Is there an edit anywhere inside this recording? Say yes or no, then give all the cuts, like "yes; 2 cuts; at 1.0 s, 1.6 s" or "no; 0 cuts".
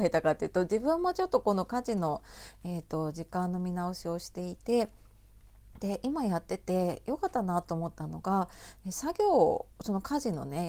yes; 1 cut; at 9.7 s